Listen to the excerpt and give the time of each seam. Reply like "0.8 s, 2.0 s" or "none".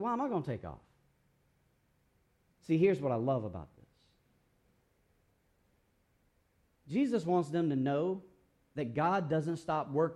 none